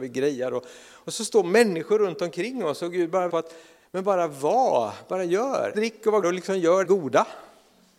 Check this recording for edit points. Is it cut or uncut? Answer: cut